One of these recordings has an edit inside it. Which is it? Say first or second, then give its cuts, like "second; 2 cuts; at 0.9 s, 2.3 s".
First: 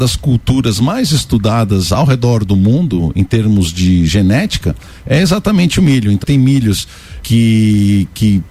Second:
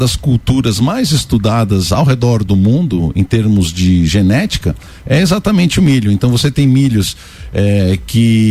first; 2 cuts; at 6.2 s, 7.2 s